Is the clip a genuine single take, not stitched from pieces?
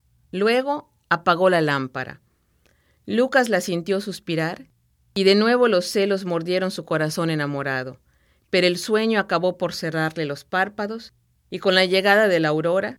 yes; 0 cuts

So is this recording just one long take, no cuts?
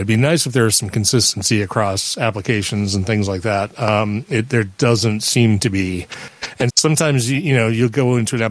no; 1 cut; at 6.7 s

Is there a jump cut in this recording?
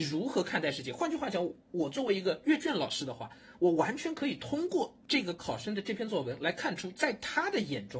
no; 0 cuts

